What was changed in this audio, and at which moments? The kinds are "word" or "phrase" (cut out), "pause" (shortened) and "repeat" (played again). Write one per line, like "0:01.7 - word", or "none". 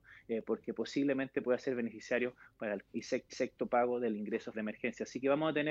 0:02.9 - word
0:03.3 - repeat
0:04.5 - word

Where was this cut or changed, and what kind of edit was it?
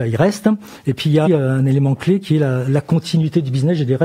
0:01.3 - word

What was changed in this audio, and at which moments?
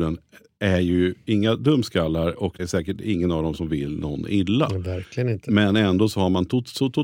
0:02.6 - word

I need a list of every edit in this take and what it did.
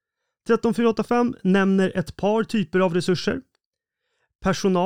none

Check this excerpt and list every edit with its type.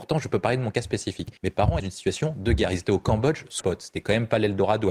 0:01.4 - pause
0:01.8 - phrase
0:03.6 - word

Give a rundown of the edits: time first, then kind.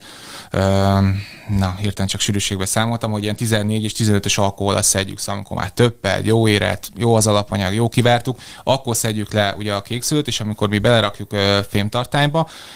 none

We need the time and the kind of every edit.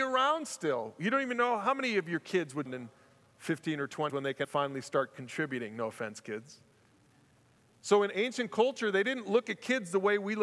0:02.7 - phrase
0:04.1 - word
0:04.4 - word

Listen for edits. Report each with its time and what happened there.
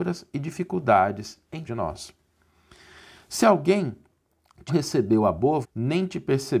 0:01.6 - word
0:04.7 - word
0:05.6 - word

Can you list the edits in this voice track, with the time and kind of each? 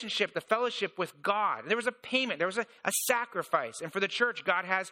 none

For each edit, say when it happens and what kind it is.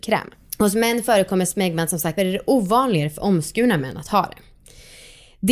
0:02.2 - phrase

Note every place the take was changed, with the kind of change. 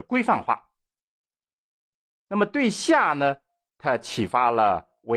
none

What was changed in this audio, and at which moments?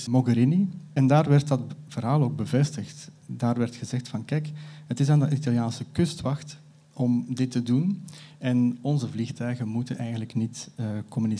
none

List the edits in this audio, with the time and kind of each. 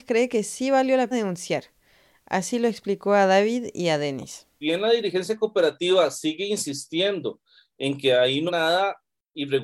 0:01.1 - word
0:04.6 - word
0:08.5 - word

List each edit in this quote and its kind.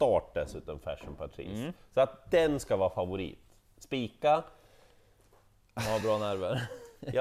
none

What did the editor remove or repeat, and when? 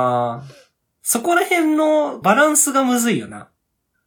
0:02.2 - phrase

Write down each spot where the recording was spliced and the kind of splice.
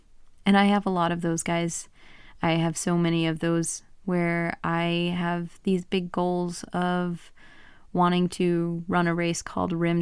none

